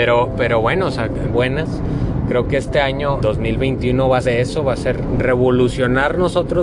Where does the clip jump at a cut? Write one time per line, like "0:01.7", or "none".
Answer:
0:01.3
0:03.2
0:04.2